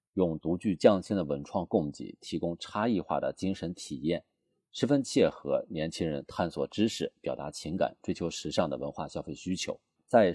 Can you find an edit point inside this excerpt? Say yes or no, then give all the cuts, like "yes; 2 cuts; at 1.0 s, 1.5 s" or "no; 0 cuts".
no; 0 cuts